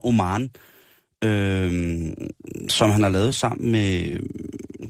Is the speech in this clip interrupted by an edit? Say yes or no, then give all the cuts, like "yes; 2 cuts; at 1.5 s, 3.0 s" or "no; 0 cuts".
no; 0 cuts